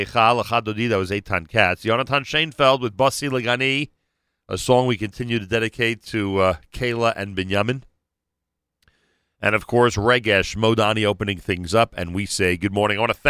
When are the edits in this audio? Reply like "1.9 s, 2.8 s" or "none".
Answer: none